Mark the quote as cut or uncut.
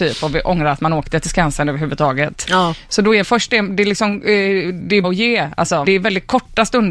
cut